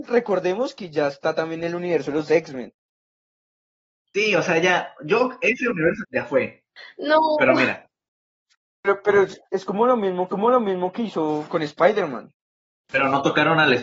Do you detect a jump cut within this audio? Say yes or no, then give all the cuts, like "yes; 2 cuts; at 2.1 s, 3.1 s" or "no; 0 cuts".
yes; 4 cuts; at 6.0 s, 9.5 s, 10.3 s, 11.5 s